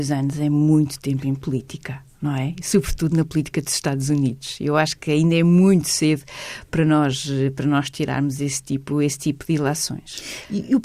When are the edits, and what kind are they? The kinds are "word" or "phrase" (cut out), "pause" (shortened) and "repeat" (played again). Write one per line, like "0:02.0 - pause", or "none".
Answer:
none

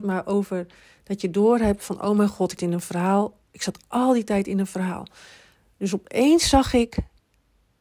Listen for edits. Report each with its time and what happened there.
0:02.6 - word
0:03.4 - pause

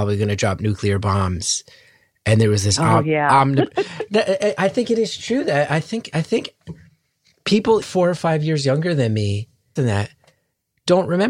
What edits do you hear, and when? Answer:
0:07.8 - word
0:09.8 - phrase

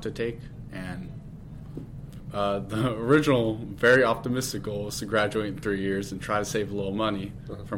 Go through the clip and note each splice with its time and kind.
none

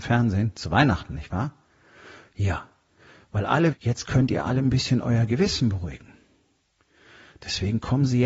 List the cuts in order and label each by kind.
0:03.7 - word

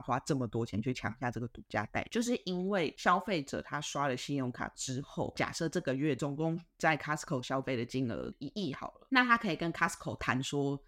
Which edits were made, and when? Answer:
none

